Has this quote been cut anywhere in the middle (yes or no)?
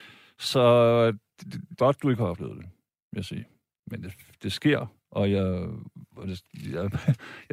yes